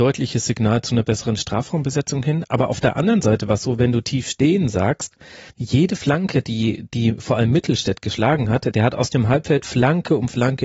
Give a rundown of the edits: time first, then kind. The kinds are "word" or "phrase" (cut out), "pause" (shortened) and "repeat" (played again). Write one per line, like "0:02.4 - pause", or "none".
0:05.5 - pause